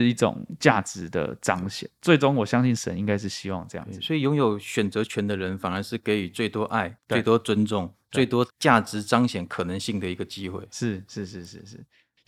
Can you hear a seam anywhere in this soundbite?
yes; 2 cuts; at 7.0 s, 8.5 s

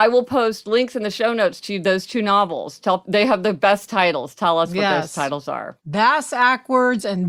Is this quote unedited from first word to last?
yes; 0 cuts

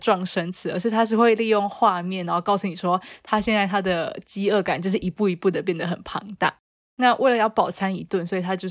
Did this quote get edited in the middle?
no; 0 cuts

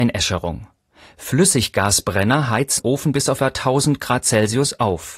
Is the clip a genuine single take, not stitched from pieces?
no; 2 cuts; at 2.8 s, 3.4 s

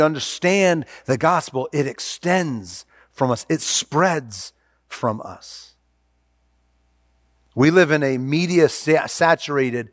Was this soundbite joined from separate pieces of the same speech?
no; 0 cuts

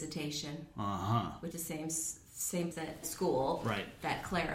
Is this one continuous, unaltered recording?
no; 3 cuts; at 1.5 s, 2.7 s, 3.0 s

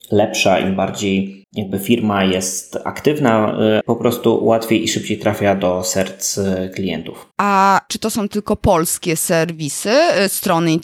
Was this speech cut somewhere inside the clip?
yes; 3 cuts; at 1.4 s, 3.8 s, 7.3 s

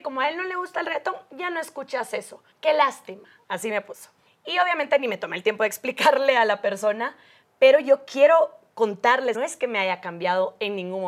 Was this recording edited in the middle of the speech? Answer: yes; 3 cuts; at 2.5 s, 4.3 s, 9.3 s

